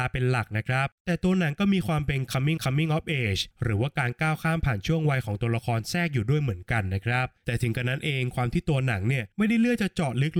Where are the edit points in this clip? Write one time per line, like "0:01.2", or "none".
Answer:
0:01.0
0:02.6
0:03.5
0:07.4
0:09.3